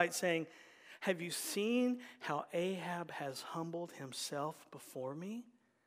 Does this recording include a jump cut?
no; 0 cuts

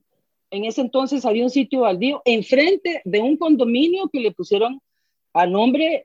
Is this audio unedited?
yes; 0 cuts

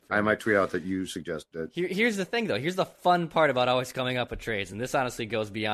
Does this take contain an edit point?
no; 0 cuts

